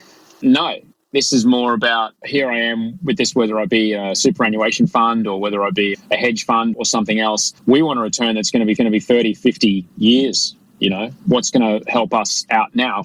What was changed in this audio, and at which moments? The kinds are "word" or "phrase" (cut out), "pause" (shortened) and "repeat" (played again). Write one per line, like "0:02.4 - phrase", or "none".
0:02.2 - pause
0:03.3 - phrase
0:05.9 - word
0:06.7 - word
0:07.6 - pause
0:08.8 - repeat